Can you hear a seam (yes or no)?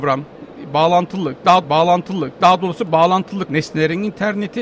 yes